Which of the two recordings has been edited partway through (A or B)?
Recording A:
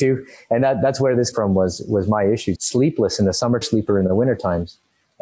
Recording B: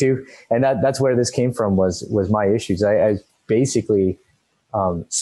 A